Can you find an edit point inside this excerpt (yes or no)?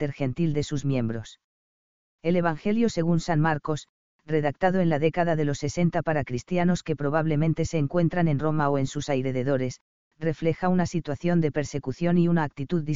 no